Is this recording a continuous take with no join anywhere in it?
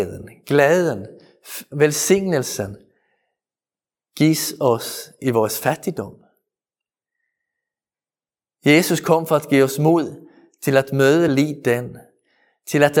yes; 0 cuts

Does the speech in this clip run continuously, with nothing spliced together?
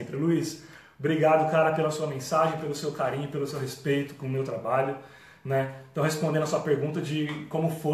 yes; 0 cuts

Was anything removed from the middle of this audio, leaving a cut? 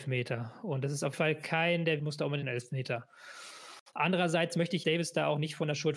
yes; 4 cuts; at 1.1 s, 2.0 s, 2.4 s, 4.8 s

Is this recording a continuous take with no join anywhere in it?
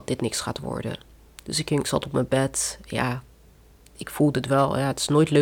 no; 1 cut; at 1.8 s

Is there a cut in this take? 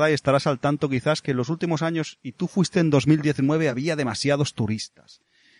no; 0 cuts

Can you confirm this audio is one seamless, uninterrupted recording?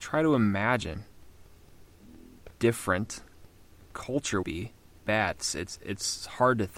no; 3 cuts; at 2.6 s, 4.4 s, 5.0 s

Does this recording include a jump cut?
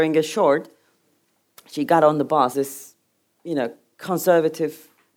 yes; 1 cut; at 2.5 s

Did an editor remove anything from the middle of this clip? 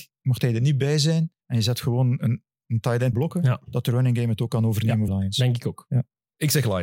yes; 3 cuts; at 1.4 s, 3.1 s, 5.1 s

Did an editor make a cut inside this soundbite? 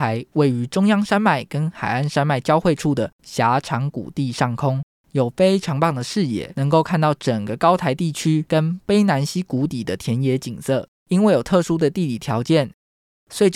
yes; 2 cuts; at 4.9 s, 11.0 s

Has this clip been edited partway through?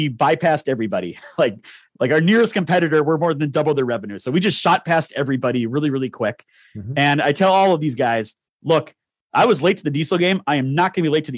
no; 0 cuts

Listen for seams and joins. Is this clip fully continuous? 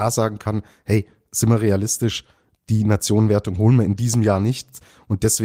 yes; 0 cuts

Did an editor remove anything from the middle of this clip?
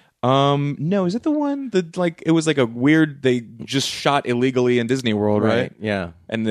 no; 0 cuts

